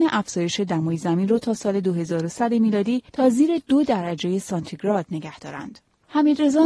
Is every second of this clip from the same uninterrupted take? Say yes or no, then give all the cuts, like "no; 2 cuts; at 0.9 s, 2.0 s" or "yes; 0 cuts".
no; 1 cut; at 3.1 s